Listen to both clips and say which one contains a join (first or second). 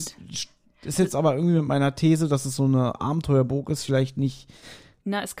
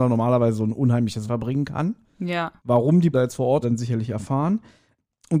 second